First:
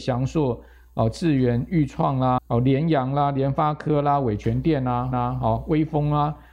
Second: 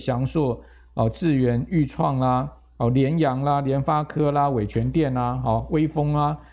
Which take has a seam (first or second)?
first